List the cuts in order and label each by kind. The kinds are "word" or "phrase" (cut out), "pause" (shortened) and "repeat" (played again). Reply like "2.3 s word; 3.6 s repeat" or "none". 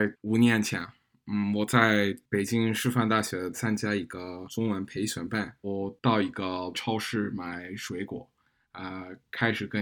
none